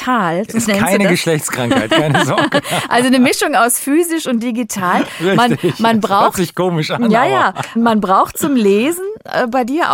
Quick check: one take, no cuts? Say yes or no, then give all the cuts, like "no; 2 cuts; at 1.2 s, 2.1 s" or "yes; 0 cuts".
no; 1 cut; at 7.8 s